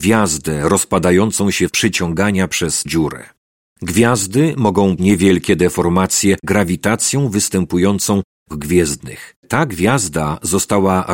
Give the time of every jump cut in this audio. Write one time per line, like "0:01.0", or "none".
0:01.7
0:02.9
0:05.0
0:06.4
0:08.5
0:09.4